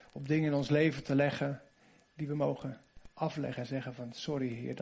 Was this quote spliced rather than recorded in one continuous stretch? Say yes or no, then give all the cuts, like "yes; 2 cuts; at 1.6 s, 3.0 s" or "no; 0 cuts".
no; 0 cuts